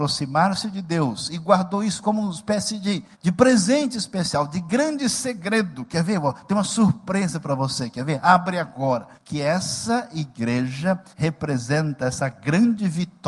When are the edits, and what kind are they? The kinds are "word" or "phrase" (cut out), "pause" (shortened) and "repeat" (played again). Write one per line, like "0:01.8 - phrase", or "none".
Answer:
0:03.1 - pause
0:09.2 - pause
0:11.1 - pause